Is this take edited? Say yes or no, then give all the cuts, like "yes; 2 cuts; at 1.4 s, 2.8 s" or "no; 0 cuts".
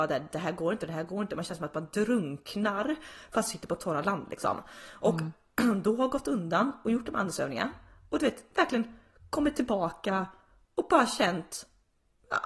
no; 0 cuts